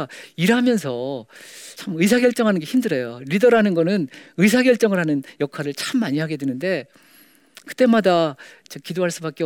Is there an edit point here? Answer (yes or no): no